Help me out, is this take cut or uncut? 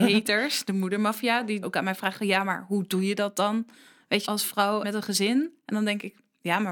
cut